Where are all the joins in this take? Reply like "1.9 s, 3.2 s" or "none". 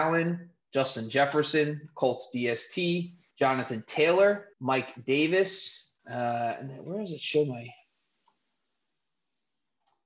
3.3 s, 4.5 s, 6.0 s